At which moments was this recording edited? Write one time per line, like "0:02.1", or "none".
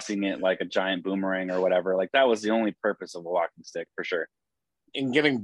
none